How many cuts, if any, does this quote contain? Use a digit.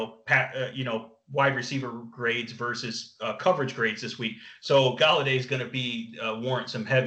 0